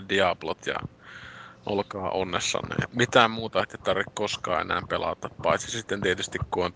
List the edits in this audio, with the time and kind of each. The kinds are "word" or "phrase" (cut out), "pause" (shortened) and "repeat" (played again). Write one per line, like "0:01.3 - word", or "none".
0:02.9 - word